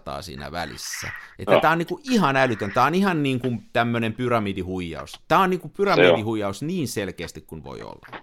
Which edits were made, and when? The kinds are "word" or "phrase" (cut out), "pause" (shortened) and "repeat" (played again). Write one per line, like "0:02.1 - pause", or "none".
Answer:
none